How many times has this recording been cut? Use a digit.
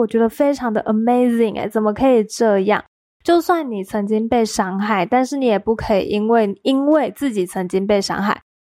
0